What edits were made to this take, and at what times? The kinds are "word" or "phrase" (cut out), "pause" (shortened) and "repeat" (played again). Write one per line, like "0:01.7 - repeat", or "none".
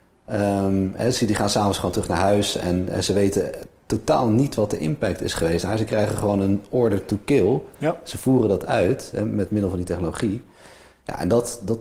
none

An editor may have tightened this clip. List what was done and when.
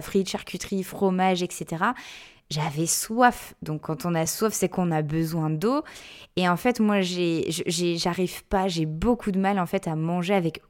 none

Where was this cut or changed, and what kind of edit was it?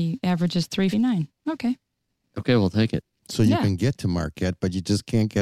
0:00.9 - word

